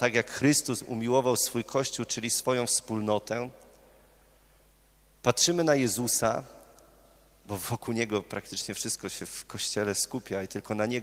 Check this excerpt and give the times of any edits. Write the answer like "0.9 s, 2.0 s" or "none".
none